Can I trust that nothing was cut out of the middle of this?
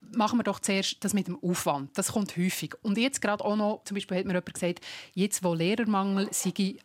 no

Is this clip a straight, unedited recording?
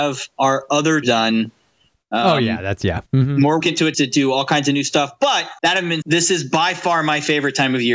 no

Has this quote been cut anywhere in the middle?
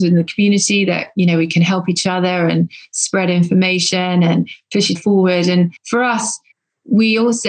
yes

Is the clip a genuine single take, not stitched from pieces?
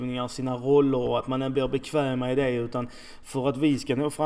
yes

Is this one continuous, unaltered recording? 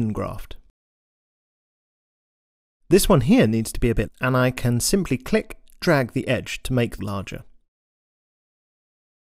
no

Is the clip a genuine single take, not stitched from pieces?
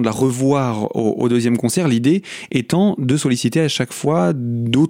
yes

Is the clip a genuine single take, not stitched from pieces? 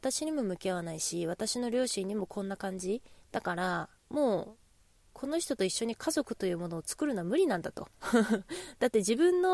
yes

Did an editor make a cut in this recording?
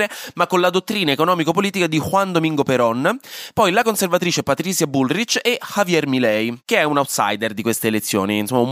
no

